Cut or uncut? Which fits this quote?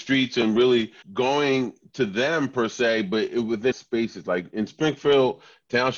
cut